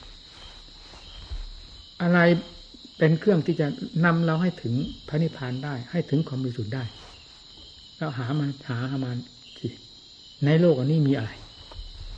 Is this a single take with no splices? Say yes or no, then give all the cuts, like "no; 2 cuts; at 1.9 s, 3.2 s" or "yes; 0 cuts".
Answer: no; 1 cut; at 10.3 s